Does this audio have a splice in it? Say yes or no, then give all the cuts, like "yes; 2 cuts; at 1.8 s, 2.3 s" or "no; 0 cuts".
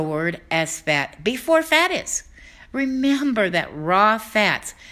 no; 0 cuts